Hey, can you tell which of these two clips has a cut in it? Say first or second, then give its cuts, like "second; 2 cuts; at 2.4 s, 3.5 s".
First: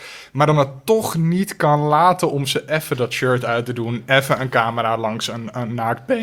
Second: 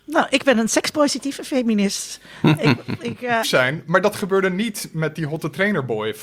second; 1 cut; at 3.4 s